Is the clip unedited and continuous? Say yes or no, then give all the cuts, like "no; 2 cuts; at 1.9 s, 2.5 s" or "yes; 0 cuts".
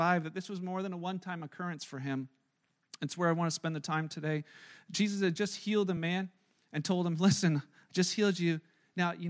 yes; 0 cuts